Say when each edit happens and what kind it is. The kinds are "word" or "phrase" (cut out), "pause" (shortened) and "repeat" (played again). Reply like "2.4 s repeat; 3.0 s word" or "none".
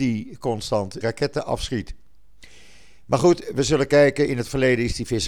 1.0 s word